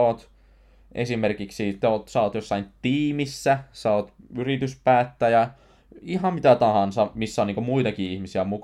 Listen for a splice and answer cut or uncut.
uncut